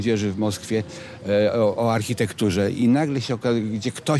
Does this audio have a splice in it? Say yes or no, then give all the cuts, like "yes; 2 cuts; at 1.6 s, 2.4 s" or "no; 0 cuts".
no; 0 cuts